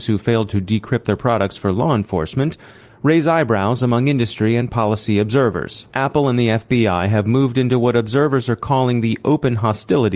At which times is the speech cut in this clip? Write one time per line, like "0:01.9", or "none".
0:05.9